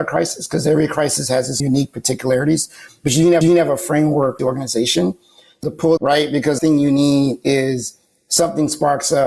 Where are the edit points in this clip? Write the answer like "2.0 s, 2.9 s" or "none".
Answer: 1.6 s, 3.4 s, 4.4 s, 5.6 s, 6.0 s, 6.6 s